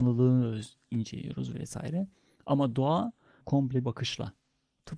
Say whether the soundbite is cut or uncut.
cut